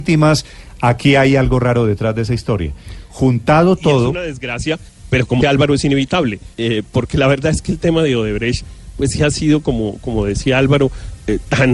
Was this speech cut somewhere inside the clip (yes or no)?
yes